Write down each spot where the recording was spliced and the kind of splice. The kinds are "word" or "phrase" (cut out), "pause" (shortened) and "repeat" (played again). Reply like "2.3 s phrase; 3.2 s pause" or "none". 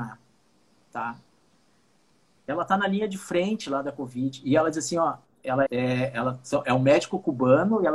5.7 s word